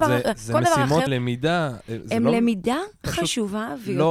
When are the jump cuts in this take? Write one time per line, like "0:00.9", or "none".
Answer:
0:01.1
0:03.0